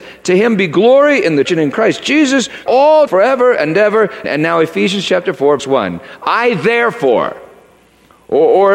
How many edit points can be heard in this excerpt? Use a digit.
5